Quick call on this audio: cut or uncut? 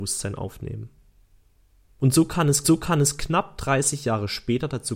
cut